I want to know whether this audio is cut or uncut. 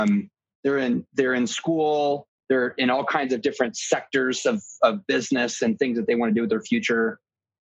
uncut